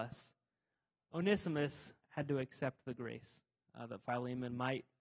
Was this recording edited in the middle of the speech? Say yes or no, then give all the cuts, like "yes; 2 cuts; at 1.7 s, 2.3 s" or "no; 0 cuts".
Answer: yes; 1 cut; at 2.0 s